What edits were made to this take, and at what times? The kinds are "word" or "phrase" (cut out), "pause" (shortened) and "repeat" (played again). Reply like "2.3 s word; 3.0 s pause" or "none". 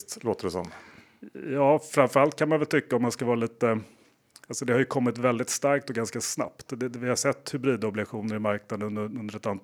none